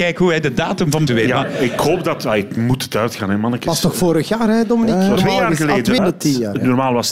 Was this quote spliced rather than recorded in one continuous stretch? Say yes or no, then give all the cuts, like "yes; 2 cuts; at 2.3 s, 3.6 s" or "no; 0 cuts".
yes; 4 cuts; at 1.1 s, 2.6 s, 5.2 s, 6.0 s